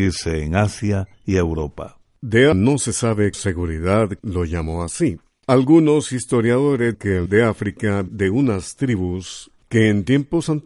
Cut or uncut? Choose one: cut